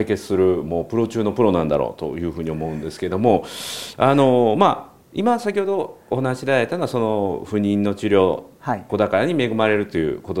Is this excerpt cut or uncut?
cut